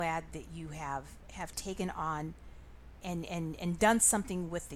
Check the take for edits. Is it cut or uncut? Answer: cut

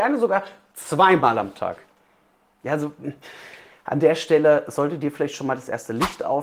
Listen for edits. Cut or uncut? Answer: uncut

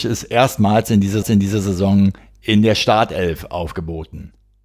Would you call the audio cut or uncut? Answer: cut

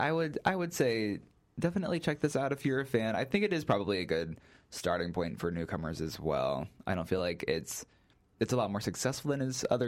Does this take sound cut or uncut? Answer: uncut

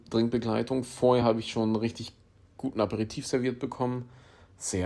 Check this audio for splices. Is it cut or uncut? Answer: uncut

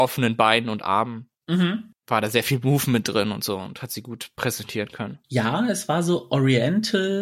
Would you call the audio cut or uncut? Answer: cut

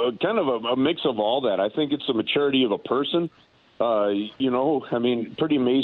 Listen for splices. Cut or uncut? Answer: uncut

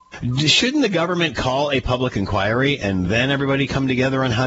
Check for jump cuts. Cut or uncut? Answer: uncut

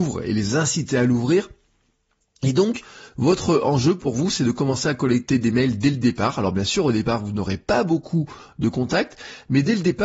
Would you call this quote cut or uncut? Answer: uncut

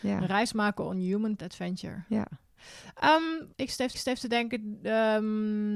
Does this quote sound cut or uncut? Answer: cut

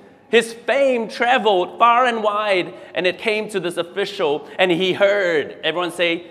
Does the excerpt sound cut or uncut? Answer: uncut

